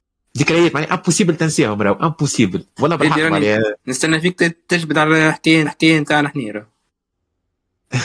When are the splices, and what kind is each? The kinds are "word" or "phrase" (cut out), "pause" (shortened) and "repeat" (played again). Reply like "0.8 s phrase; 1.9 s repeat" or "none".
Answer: 2.7 s pause; 3.8 s pause; 5.7 s repeat